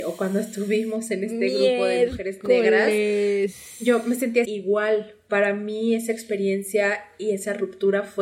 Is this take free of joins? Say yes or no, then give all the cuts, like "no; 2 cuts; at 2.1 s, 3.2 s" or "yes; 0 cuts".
no; 1 cut; at 4.4 s